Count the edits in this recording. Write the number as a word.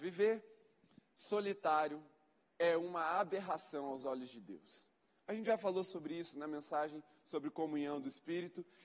zero